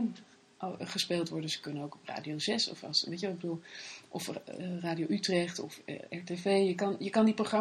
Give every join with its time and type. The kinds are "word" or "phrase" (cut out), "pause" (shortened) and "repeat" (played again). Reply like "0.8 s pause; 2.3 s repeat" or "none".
none